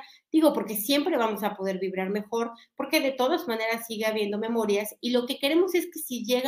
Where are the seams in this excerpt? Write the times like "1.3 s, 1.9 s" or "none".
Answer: none